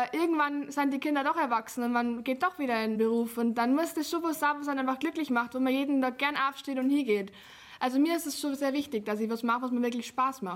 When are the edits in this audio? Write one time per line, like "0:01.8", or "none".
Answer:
none